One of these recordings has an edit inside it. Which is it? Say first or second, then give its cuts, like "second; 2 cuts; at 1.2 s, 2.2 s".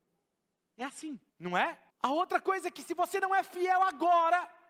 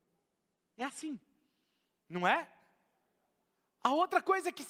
first; 2 cuts; at 1.3 s, 1.9 s